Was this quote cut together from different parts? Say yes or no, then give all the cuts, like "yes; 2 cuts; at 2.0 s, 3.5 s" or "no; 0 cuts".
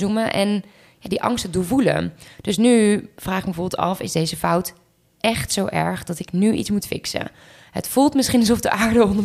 no; 0 cuts